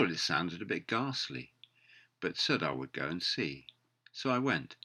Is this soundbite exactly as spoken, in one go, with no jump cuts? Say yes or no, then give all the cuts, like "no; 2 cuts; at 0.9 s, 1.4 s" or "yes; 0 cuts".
yes; 0 cuts